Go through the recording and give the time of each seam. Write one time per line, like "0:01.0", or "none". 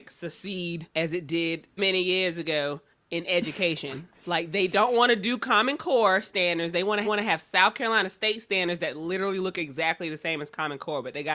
0:00.9
0:01.8
0:02.9
0:04.2
0:07.0